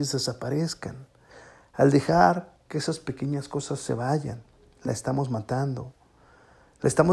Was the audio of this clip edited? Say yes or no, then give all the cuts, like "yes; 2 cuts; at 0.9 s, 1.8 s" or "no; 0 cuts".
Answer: no; 0 cuts